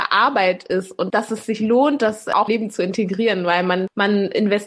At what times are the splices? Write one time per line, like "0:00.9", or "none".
0:02.5